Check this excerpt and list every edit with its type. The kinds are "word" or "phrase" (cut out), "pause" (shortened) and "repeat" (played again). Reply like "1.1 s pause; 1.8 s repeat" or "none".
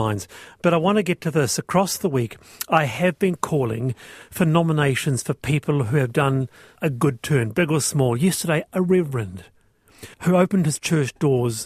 6.8 s word; 10.1 s pause